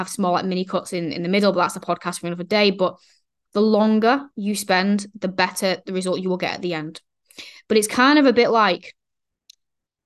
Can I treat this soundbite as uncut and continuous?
yes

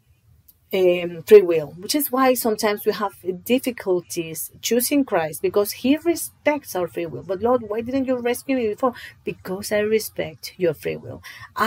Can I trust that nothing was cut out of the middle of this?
yes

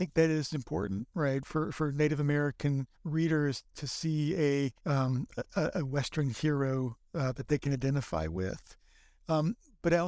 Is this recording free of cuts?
no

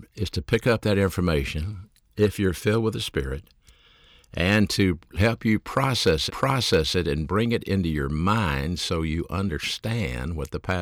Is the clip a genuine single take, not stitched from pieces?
no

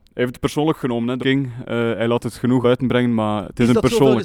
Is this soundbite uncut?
no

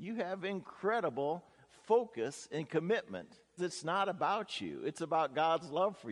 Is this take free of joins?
no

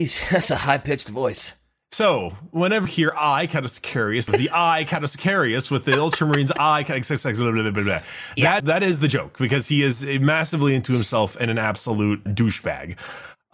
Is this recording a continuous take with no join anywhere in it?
no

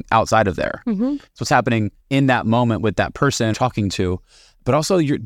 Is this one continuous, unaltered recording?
no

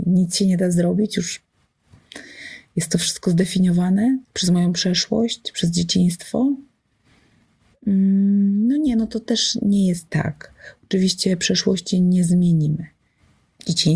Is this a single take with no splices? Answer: no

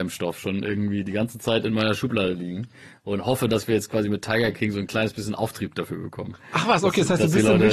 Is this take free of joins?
yes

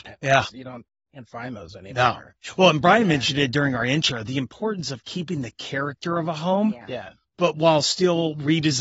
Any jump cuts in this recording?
no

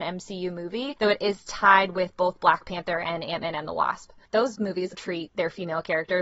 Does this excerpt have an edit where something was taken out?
yes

